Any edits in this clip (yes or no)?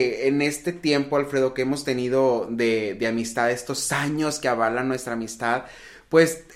no